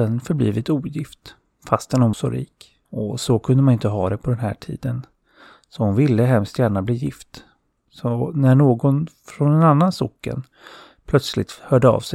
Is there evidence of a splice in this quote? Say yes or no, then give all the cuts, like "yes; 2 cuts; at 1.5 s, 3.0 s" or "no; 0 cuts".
yes; 2 cuts; at 2.1 s, 2.8 s